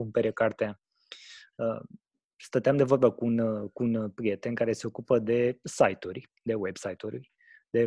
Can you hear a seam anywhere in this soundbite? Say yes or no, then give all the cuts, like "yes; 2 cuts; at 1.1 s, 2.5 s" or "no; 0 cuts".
no; 0 cuts